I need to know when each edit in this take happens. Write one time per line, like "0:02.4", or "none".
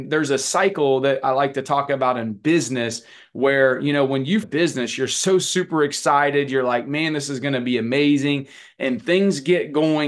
0:04.4